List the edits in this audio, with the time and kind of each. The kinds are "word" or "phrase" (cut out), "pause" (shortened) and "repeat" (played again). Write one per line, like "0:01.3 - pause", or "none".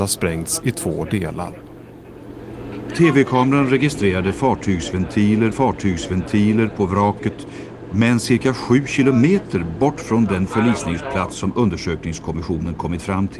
0:05.5 - repeat